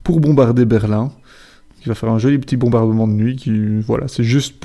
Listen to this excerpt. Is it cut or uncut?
uncut